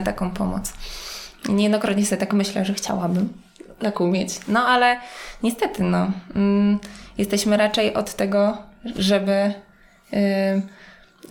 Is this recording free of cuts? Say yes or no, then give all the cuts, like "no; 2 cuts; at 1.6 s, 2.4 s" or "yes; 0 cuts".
yes; 0 cuts